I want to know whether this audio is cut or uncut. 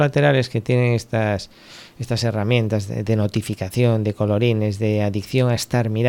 uncut